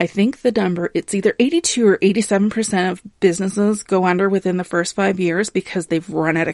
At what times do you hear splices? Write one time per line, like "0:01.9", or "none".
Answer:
none

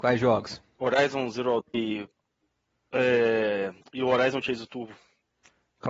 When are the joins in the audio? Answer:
0:01.6

